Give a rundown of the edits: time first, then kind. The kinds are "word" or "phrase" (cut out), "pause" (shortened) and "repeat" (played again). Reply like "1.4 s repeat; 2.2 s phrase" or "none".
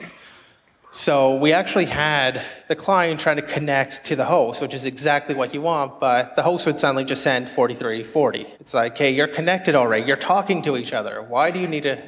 8.5 s pause